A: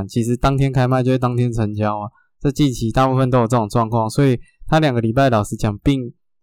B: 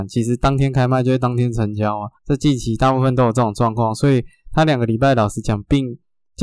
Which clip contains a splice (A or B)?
B